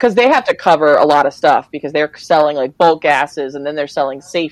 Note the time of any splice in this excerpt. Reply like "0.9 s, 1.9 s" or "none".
none